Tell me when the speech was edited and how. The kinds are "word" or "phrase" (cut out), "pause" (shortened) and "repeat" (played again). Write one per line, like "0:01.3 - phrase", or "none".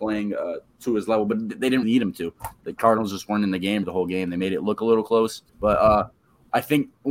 0:01.8 - word
0:03.8 - word
0:05.5 - pause

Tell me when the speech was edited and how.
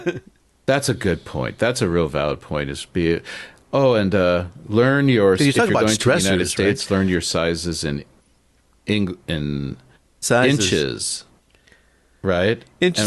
0:10.2 - word

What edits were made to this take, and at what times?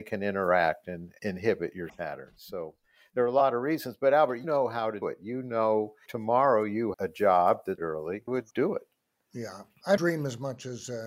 0:01.9 - word
0:04.4 - word
0:05.0 - word
0:06.1 - word
0:06.9 - word
0:07.8 - word
0:08.3 - word
0:10.0 - word

